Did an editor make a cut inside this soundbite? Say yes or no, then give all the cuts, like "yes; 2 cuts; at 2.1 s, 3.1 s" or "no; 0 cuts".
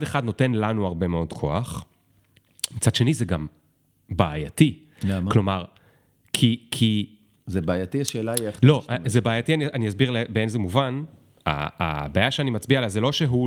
no; 0 cuts